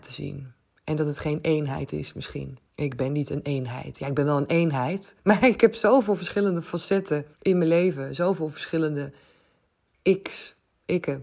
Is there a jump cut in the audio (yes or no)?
yes